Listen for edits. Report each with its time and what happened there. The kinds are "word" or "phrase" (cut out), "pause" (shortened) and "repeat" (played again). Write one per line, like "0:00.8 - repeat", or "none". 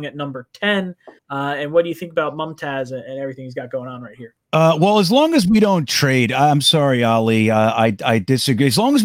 0:01.2 - pause
0:04.4 - pause